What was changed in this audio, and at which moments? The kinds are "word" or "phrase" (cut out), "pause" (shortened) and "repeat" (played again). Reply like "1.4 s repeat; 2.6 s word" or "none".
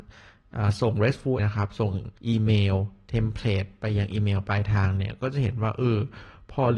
1.4 s word; 2.2 s pause